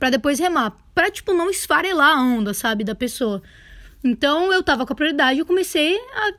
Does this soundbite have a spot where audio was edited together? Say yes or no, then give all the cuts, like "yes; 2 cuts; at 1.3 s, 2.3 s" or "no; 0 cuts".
no; 0 cuts